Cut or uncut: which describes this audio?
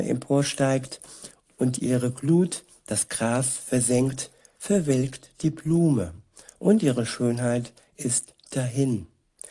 uncut